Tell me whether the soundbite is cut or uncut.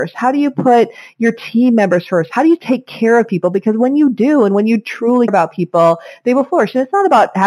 cut